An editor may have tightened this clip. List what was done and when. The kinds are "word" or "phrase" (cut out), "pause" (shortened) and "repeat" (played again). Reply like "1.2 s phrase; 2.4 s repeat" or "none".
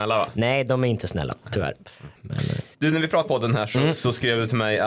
2.7 s pause; 3.2 s word

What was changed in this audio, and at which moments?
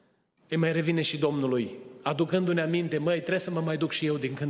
none

